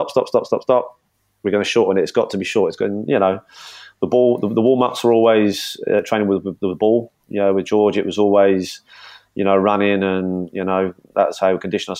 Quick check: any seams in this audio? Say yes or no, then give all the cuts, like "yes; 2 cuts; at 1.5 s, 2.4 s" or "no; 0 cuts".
no; 0 cuts